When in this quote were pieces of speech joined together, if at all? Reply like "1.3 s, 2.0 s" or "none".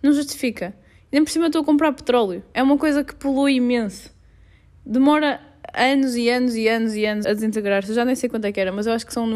7.2 s